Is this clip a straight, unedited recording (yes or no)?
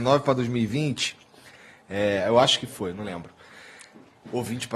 yes